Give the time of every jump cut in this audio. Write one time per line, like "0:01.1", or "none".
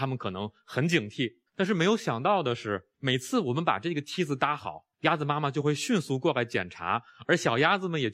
0:01.5
0:02.9
0:04.9